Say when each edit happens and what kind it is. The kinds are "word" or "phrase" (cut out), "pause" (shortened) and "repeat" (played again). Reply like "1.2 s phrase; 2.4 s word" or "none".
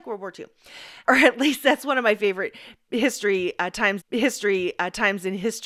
1.1 s word; 4.0 s repeat